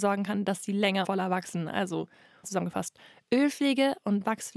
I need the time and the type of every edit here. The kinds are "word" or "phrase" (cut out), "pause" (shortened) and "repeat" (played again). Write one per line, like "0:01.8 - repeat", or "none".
0:01.0 - word
0:02.4 - word